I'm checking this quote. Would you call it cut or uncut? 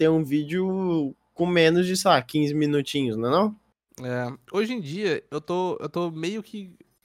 uncut